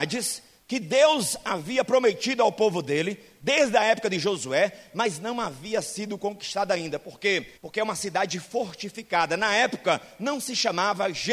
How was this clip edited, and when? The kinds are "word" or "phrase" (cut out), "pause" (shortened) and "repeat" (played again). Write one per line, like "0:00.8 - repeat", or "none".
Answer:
0:07.6 - pause

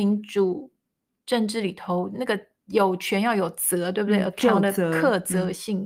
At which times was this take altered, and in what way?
0:02.6 - pause

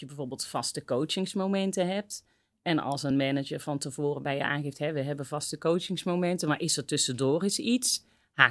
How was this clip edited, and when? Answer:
none

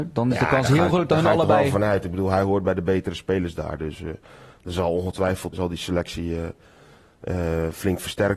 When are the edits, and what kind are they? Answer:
0:05.5 - word

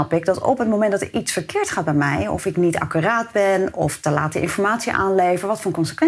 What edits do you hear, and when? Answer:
none

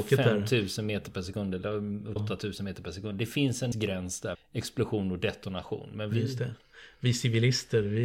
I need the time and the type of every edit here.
0:02.2 - word
0:03.7 - word
0:04.3 - word

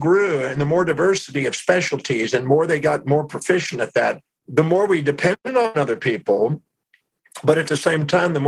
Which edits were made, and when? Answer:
none

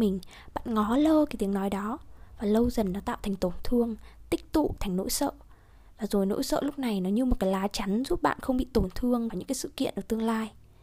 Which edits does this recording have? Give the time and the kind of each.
0:09.3 - word

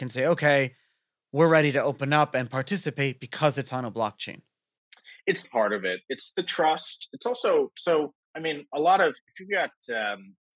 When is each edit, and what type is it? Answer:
0:05.4 - word
0:08.2 - pause

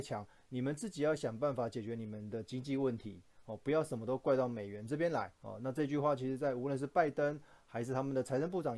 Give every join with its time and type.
0:05.4 - pause

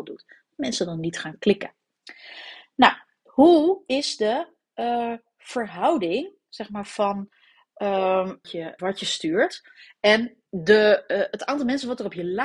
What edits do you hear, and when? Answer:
0:08.4 - phrase
0:08.8 - word
0:10.5 - word

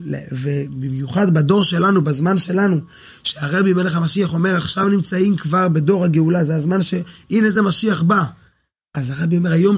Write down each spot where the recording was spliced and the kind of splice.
none

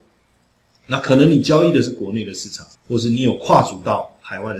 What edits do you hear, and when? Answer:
0:02.7 - pause

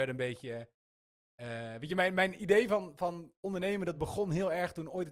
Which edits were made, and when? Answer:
none

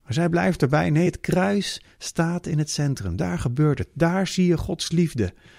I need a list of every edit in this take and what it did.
none

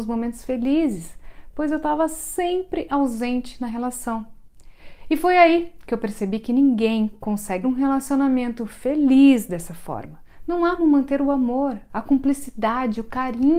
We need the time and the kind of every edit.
0:07.6 - word
0:10.8 - word

